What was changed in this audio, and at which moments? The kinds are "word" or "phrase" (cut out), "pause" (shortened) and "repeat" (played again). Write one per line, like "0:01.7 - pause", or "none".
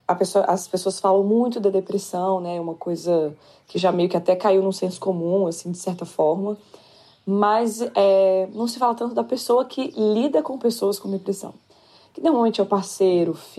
none